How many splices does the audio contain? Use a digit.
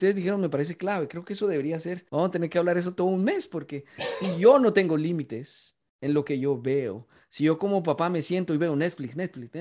1